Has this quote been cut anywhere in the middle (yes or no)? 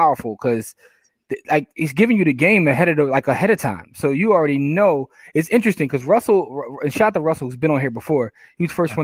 no